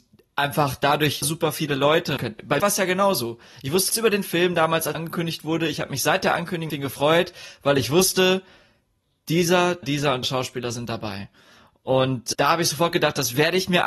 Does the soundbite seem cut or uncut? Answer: cut